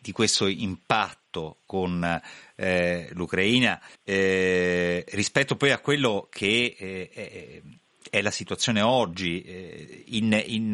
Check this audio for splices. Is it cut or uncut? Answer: cut